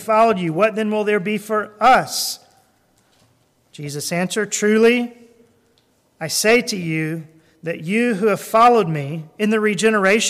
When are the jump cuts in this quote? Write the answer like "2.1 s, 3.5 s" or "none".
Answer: none